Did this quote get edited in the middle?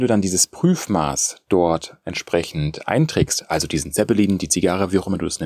no; 0 cuts

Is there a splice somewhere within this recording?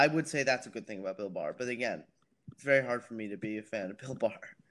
no; 0 cuts

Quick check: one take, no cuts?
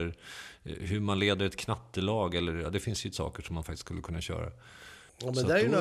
no; 1 cut; at 3.1 s

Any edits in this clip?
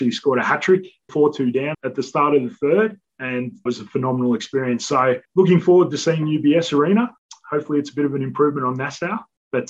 yes; 4 cuts; at 1.1 s, 1.7 s, 3.7 s, 5.2 s

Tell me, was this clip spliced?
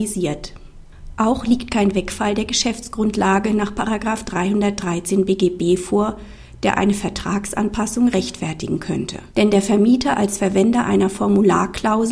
yes; 1 cut; at 9.3 s

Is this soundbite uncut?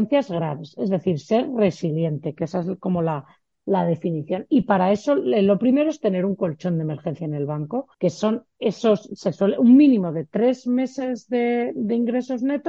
no; 1 cut; at 7.9 s

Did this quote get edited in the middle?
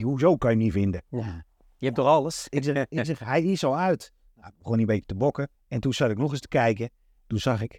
yes; 1 cut; at 5.5 s

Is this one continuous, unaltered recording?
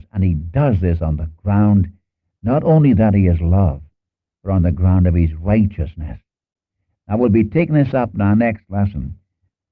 yes; 0 cuts

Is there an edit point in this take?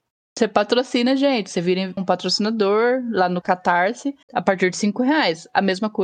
yes; 3 cuts; at 2.0 s, 3.4 s, 4.2 s

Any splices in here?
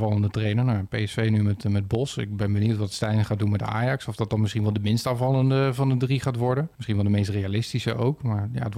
yes; 1 cut; at 6.7 s

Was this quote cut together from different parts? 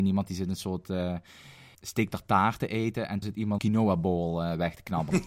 yes; 2 cuts; at 3.2 s, 3.6 s

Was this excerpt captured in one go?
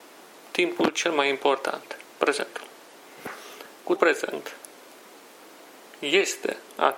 no; 2 cuts; at 2.1 s, 4.0 s

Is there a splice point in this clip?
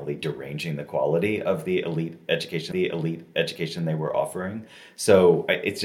yes; 1 cut; at 2.7 s

